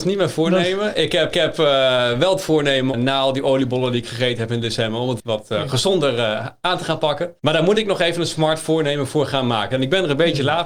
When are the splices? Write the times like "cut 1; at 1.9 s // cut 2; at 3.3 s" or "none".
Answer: cut 1; at 1.3 s // cut 2; at 2.9 s // cut 3; at 5.2 s